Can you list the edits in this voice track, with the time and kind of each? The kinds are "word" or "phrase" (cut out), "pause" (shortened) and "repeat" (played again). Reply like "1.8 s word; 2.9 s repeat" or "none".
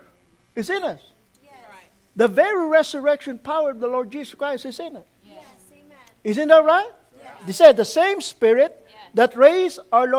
none